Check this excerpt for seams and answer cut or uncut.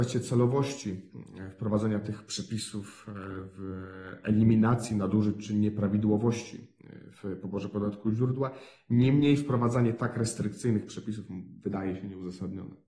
uncut